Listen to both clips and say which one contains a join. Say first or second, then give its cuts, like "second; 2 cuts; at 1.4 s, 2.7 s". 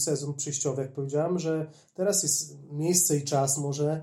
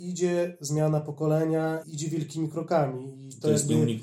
second; 1 cut; at 1.8 s